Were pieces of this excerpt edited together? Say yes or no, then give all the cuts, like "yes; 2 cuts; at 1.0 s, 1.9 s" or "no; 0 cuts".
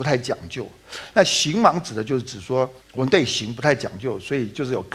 yes; 1 cut; at 2.8 s